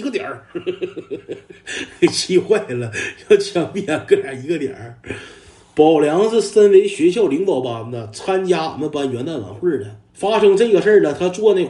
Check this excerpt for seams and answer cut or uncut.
cut